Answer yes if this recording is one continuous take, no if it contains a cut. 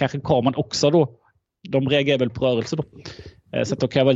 yes